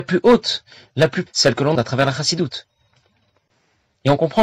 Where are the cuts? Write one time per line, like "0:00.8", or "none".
0:01.3
0:01.8